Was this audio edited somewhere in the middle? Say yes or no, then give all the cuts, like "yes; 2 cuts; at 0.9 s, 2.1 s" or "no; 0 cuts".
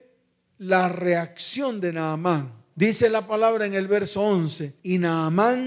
no; 0 cuts